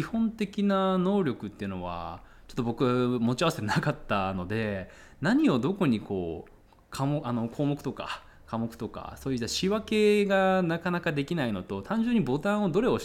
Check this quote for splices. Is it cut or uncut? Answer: uncut